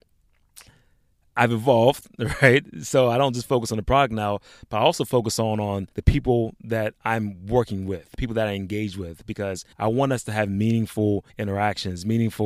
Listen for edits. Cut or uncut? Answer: cut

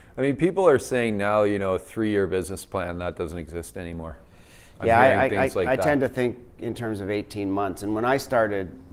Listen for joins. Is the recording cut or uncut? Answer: uncut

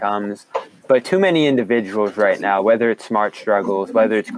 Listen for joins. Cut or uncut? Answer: uncut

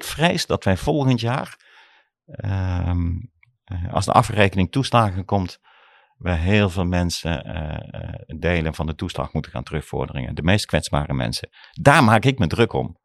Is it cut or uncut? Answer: uncut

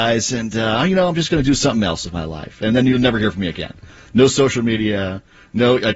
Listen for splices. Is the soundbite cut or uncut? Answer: uncut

